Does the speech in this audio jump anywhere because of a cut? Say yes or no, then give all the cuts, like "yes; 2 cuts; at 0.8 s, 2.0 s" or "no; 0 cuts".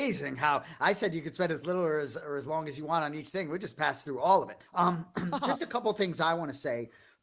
yes; 1 cut; at 4.7 s